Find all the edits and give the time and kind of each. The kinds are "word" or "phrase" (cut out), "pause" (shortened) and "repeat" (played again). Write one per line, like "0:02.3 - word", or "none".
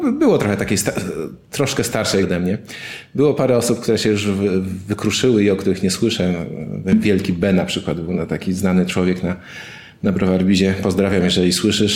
0:02.2 - word